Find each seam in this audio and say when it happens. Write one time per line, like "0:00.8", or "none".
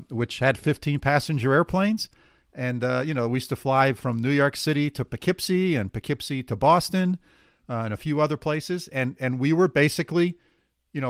none